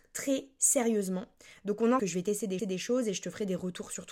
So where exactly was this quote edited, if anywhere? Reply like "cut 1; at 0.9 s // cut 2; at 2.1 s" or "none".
cut 1; at 2.0 s // cut 2; at 2.6 s